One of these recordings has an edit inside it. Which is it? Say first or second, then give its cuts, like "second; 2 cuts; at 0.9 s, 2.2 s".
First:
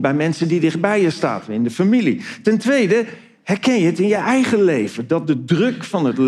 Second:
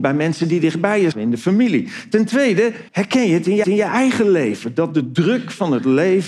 second; 3 cuts; at 1.1 s, 2.9 s, 3.6 s